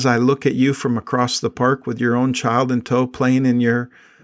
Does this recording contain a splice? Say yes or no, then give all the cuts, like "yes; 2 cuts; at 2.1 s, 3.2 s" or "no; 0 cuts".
no; 0 cuts